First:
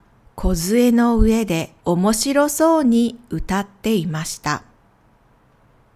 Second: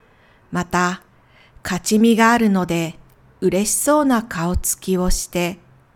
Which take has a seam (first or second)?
first